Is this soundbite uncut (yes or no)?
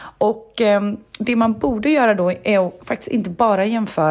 yes